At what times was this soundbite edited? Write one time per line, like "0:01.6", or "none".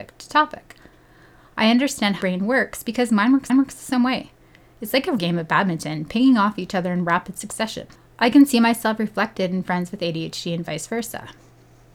0:02.2
0:03.5
0:05.2
0:07.9